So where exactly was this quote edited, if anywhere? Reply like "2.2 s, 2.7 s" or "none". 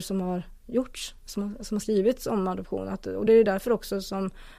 none